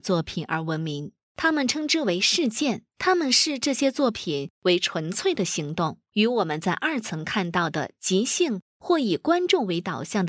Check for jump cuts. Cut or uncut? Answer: cut